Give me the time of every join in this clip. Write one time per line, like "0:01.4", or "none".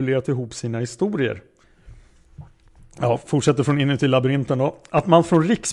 none